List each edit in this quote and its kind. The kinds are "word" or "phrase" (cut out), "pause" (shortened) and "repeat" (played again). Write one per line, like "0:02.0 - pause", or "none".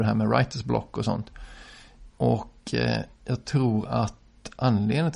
0:02.1 - pause
0:03.1 - pause

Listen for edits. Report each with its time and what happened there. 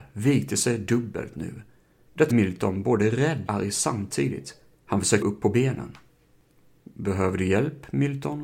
0:02.3 - word
0:03.5 - word
0:04.7 - pause
0:05.2 - word

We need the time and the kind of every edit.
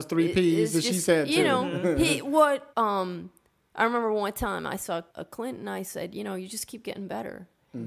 0:02.7 - pause
0:05.1 - pause

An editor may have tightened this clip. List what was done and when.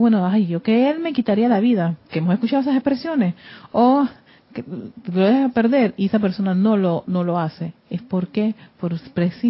0:02.0 - pause

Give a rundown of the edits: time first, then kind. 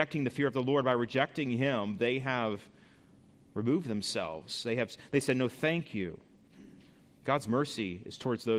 none

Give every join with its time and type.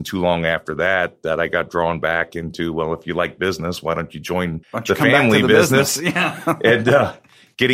0:04.6 - pause

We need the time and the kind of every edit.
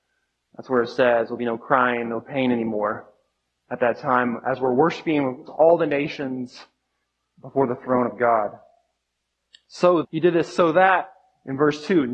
0:05.5 - word
0:07.0 - pause
0:10.0 - word

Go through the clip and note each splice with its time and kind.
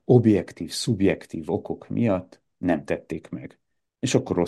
none

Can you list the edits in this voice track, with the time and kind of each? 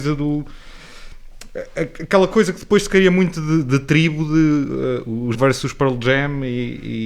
0:05.3 - word

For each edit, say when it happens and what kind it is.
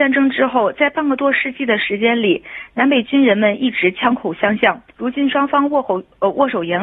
0:04.9 - pause

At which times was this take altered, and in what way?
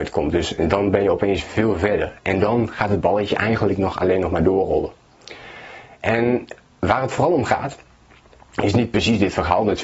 none

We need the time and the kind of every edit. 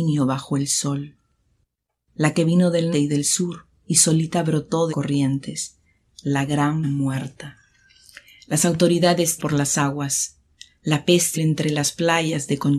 0:02.9 - word
0:04.9 - word
0:06.8 - word
0:09.4 - word
0:11.3 - word

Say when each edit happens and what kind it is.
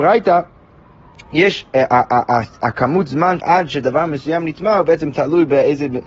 0:03.4 - word

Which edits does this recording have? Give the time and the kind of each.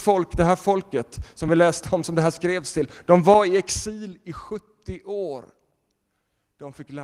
none

